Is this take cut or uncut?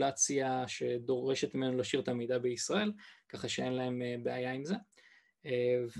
uncut